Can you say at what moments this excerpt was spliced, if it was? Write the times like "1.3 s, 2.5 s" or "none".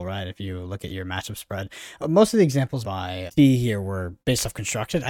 2.0 s, 2.8 s, 3.3 s, 4.2 s

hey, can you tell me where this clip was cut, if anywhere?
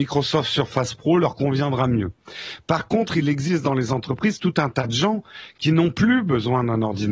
none

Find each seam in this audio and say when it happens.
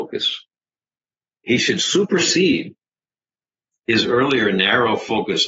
none

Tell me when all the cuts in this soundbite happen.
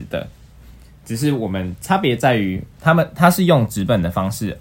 2.7 s

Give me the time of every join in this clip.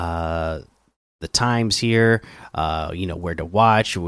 none

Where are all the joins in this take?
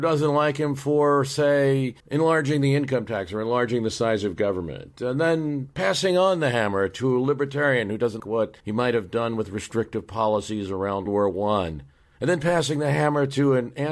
2.0 s, 8.2 s, 8.6 s, 11.1 s

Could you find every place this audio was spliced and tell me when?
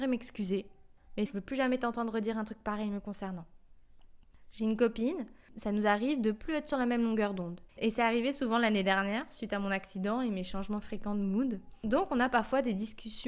1.3 s, 7.7 s

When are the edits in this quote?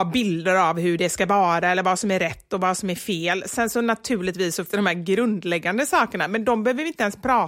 4.7 s

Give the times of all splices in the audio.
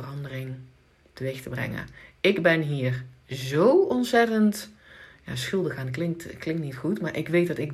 none

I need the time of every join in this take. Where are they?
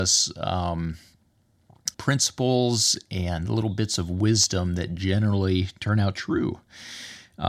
1.9 s, 6.1 s

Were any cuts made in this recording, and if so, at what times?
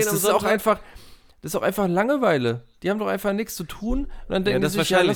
none

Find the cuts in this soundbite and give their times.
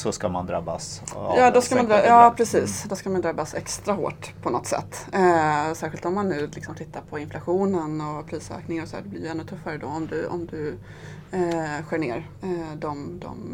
none

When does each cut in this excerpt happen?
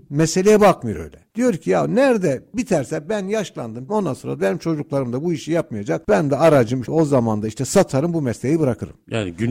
3.9 s, 6.8 s

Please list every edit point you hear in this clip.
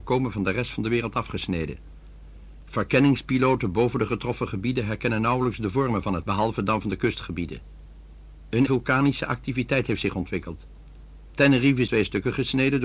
6.2 s, 8.7 s, 11.9 s

